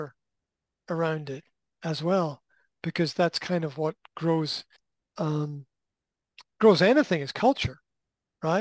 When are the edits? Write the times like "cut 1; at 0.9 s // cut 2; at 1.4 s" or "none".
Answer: cut 1; at 4.8 s